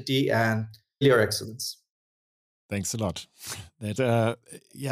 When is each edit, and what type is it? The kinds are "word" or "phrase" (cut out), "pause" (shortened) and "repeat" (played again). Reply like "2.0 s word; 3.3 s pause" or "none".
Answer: 1.0 s word; 4.0 s word